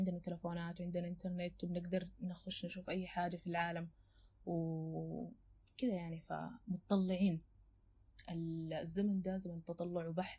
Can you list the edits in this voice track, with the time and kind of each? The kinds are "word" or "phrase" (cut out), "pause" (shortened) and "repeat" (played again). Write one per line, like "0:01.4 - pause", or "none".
none